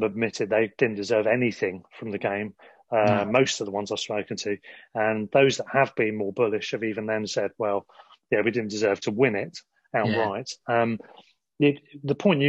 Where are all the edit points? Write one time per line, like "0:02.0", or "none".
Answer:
none